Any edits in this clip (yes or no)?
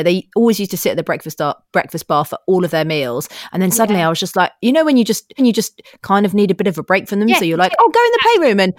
yes